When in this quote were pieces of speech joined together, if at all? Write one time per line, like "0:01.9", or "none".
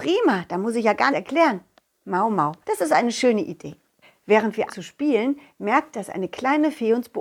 0:01.1
0:02.6
0:04.0
0:04.7
0:05.9